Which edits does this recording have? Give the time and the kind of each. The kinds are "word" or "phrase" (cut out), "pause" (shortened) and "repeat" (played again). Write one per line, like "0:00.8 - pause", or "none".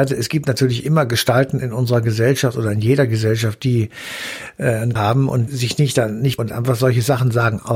0:05.0 - word
0:05.5 - word
0:06.4 - word